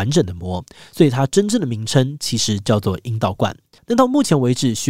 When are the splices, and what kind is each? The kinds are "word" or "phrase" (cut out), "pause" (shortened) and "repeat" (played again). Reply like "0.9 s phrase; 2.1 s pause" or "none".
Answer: 3.8 s pause